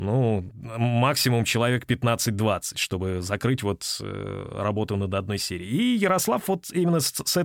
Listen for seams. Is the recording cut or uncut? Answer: uncut